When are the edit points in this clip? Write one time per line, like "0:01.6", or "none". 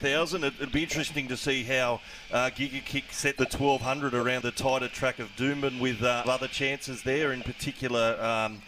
0:03.4
0:04.4
0:06.2